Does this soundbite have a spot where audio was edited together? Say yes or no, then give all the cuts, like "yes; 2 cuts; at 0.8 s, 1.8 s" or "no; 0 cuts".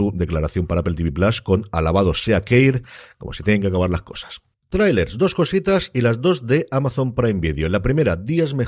no; 0 cuts